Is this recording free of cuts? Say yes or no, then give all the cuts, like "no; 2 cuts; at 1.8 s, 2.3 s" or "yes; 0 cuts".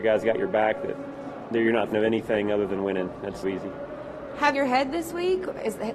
no; 3 cuts; at 1.9 s, 3.4 s, 4.5 s